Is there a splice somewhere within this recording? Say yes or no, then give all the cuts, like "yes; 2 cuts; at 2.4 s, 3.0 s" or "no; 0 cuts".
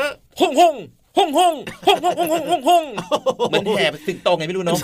no; 0 cuts